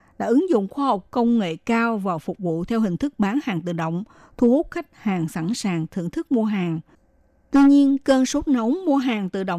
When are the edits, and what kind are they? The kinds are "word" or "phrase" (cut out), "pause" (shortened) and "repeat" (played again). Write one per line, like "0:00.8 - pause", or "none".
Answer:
none